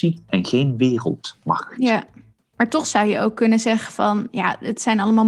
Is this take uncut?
yes; 0 cuts

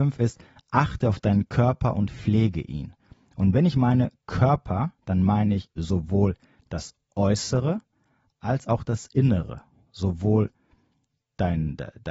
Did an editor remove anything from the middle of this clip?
no; 0 cuts

